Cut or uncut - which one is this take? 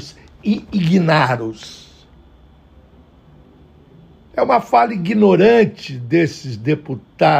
uncut